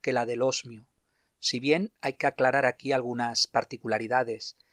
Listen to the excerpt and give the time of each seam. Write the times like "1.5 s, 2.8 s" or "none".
none